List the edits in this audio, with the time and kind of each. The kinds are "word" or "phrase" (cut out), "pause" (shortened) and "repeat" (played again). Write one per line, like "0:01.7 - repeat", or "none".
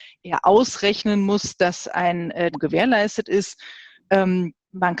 0:02.5 - phrase